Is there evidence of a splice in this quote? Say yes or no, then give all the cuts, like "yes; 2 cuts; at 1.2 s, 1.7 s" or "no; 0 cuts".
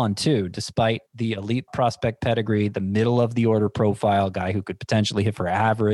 yes; 2 cuts; at 1.1 s, 1.7 s